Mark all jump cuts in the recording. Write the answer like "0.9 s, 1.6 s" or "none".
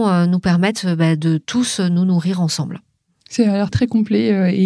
3.7 s